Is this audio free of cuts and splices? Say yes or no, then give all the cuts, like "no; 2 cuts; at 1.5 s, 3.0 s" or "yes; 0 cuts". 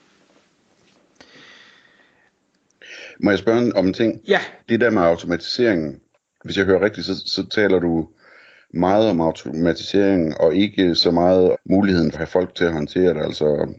no; 4 cuts; at 4.6 s, 6.1 s, 11.5 s, 12.1 s